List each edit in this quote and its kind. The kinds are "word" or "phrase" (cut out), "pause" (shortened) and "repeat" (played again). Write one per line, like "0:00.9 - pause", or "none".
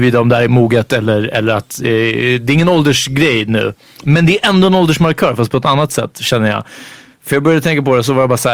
none